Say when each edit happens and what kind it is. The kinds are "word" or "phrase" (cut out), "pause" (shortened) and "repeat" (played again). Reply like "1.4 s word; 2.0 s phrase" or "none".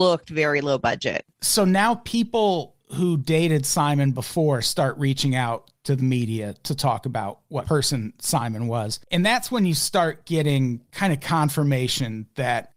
2.8 s pause; 7.6 s phrase; 9.0 s pause; 10.8 s pause